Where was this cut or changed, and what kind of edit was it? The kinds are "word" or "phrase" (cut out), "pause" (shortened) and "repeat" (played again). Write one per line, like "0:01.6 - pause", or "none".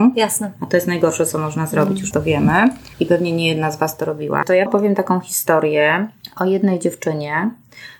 0:02.1 - word
0:02.9 - pause
0:04.7 - word